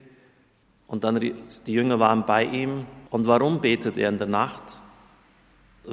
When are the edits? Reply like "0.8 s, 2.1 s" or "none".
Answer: 3.1 s